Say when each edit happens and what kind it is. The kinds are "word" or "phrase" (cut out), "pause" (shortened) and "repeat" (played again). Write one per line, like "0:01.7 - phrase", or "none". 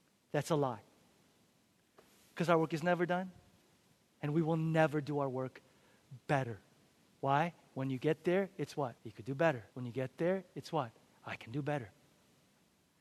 0:09.0 - pause
0:09.7 - pause